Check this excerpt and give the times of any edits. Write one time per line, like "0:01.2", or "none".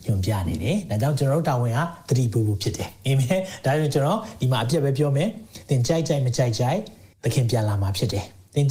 0:07.1